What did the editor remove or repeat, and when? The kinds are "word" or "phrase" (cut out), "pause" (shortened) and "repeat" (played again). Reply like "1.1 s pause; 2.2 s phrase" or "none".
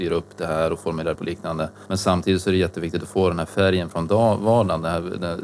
1.2 s word; 1.9 s pause